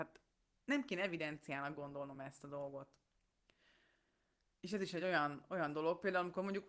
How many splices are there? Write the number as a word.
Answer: zero